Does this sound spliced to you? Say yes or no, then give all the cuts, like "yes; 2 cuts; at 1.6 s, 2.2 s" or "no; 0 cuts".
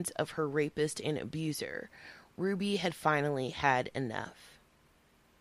no; 0 cuts